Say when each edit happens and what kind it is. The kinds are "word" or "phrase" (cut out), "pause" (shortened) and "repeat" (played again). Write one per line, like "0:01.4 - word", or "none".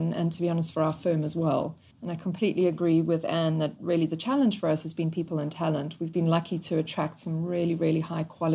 0:01.9 - pause